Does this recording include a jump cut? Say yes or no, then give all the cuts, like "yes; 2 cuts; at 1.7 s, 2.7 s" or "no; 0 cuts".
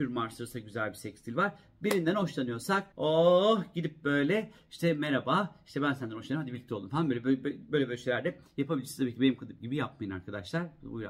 yes; 1 cut; at 2.9 s